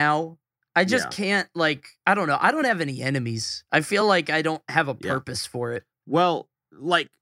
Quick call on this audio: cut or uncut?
uncut